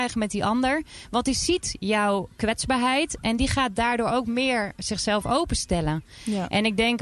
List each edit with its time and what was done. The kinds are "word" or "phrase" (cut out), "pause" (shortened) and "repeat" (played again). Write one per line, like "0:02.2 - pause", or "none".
none